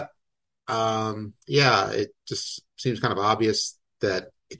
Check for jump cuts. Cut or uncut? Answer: cut